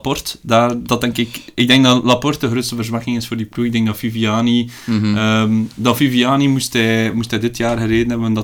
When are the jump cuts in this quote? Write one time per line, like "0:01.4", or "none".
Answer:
none

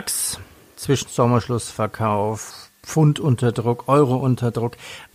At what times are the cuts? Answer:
0:01.1

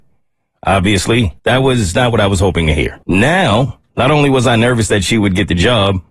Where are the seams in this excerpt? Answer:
0:01.4
0:03.0

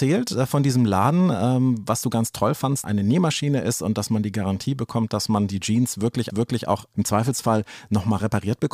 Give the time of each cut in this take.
0:02.8
0:06.3

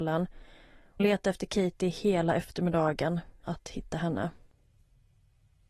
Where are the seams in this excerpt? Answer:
0:01.0
0:03.4

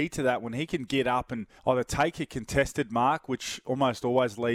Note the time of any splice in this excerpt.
0:01.6

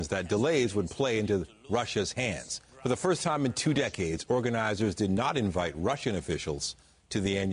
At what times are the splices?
0:02.7

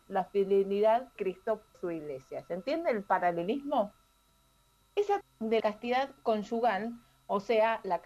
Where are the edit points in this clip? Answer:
0:01.2
0:01.7
0:05.2
0:05.6

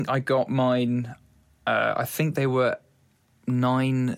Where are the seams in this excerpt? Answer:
none

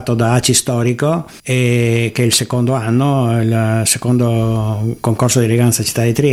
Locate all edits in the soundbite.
0:01.4

